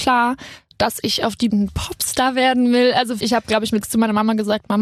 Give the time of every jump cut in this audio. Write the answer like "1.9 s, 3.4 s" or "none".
1.5 s, 3.2 s, 3.8 s